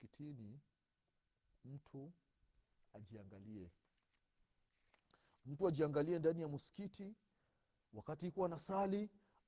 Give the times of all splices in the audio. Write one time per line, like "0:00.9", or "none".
none